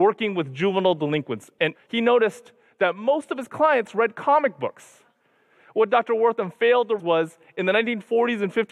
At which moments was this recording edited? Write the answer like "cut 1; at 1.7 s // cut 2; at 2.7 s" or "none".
cut 1; at 1.7 s // cut 2; at 7.0 s